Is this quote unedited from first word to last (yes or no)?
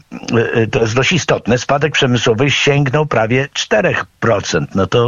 no